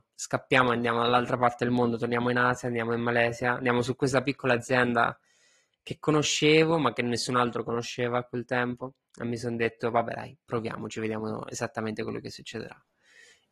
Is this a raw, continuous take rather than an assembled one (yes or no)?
yes